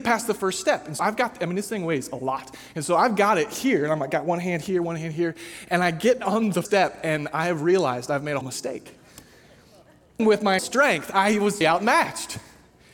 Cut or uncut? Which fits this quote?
cut